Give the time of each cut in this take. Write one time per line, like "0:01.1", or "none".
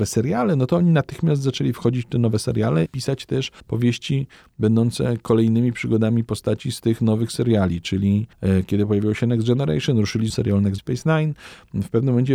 0:02.9
0:03.6
0:08.3
0:10.3
0:10.8